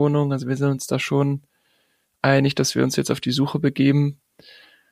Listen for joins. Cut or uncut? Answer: uncut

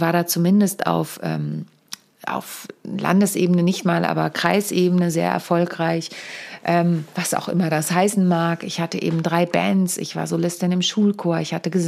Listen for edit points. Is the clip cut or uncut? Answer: uncut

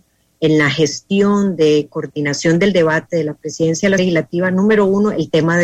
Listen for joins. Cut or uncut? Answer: cut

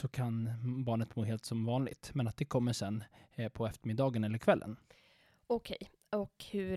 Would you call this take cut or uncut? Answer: uncut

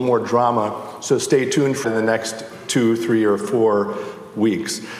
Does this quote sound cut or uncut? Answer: cut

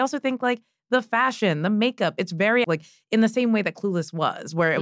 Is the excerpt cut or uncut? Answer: cut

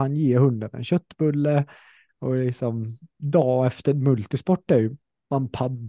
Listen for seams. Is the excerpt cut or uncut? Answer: uncut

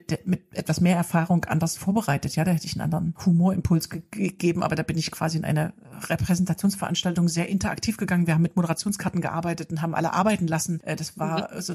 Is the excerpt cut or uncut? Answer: uncut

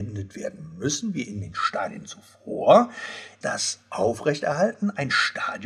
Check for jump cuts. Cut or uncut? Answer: cut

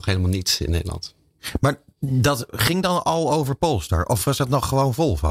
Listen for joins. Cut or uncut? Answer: uncut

